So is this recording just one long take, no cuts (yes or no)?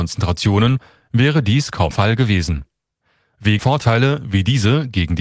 no